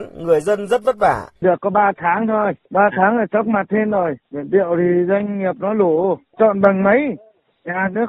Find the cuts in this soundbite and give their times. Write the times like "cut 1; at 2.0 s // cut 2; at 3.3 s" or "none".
cut 1; at 1.4 s // cut 2; at 4.2 s